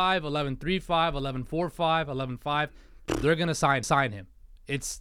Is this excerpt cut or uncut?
cut